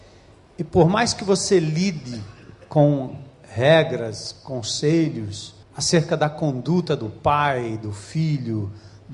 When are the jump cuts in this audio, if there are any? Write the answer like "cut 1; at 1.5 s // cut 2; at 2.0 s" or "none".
cut 1; at 5.6 s